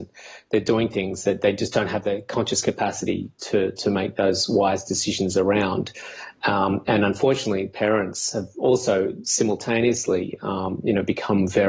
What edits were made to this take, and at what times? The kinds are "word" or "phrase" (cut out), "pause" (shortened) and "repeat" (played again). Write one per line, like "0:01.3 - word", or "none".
none

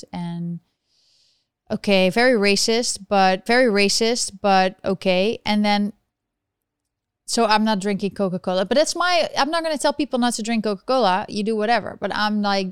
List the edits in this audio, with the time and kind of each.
0:03.5 - repeat

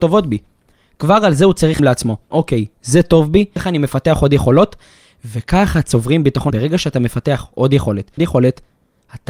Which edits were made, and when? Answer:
0:01.8 - word
0:02.3 - word
0:03.6 - word
0:06.5 - word
0:08.2 - phrase

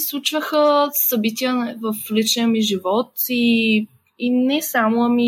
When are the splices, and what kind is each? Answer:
none

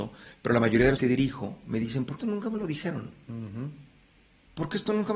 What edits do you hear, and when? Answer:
0:01.0 - word
0:02.2 - word

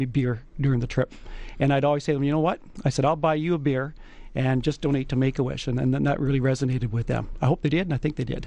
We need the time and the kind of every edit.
none

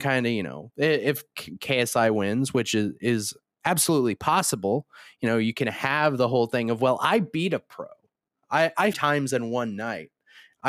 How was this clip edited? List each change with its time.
0:08.9 - phrase

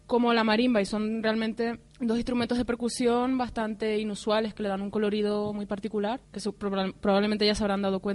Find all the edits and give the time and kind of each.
0:01.9 - pause
0:06.2 - pause

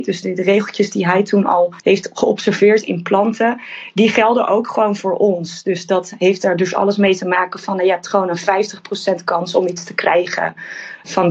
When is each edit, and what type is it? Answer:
0:01.8 - pause

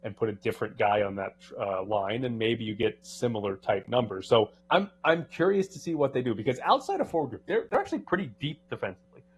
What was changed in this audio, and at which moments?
0:04.6 - pause

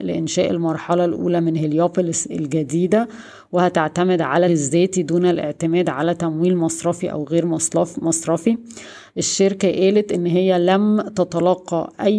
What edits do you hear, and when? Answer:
0:04.5 - word

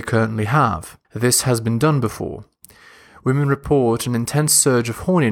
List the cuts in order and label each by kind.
0:01.0 - pause

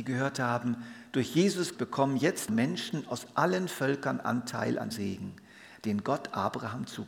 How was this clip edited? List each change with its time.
0:01.7 - word
0:02.5 - word
0:04.9 - word

